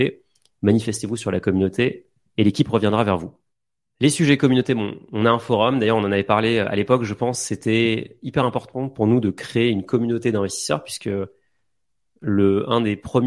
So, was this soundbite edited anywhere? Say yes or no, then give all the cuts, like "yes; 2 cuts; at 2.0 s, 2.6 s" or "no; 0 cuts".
no; 0 cuts